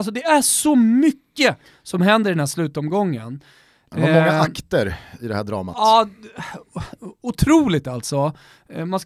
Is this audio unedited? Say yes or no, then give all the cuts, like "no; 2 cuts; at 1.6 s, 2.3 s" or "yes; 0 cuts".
yes; 0 cuts